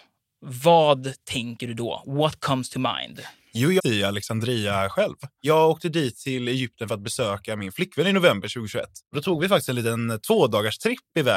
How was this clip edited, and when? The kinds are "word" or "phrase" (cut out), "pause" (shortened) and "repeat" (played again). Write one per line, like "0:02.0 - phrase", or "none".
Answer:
0:03.8 - phrase